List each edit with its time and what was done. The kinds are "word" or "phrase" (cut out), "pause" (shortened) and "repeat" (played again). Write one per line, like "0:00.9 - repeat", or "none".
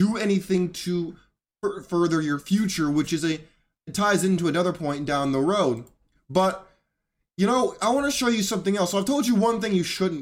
none